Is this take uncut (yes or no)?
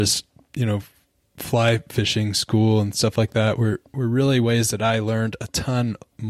yes